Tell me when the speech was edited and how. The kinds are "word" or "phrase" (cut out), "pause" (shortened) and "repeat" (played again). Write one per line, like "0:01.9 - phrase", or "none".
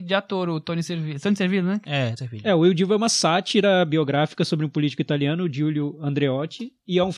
0:02.2 - word